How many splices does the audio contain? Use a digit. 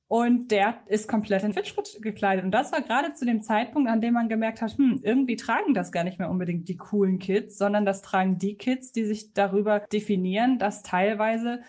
1